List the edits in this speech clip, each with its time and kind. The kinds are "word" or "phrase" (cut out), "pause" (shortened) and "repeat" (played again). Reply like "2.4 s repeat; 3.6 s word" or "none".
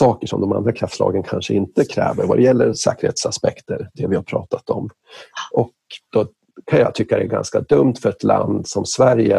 none

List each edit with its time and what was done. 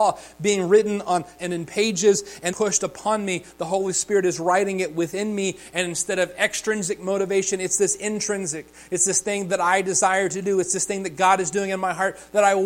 1.4 s word; 2.5 s word

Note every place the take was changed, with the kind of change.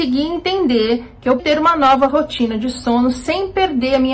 1.4 s word

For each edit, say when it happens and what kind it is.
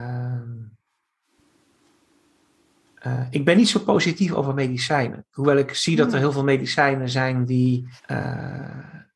8.0 s pause

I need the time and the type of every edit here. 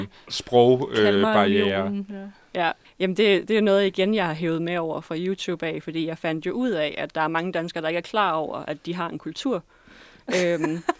2.8 s pause

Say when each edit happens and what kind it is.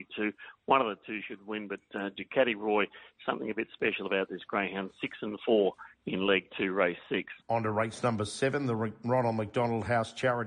7.4 s pause

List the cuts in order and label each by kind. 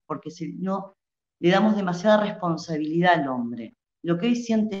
none

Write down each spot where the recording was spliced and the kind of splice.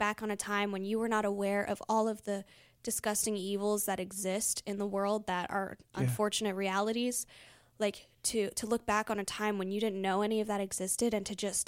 none

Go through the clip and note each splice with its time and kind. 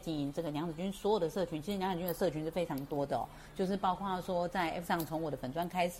4.8 s word

